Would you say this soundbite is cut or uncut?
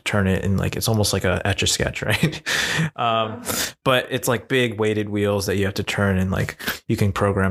uncut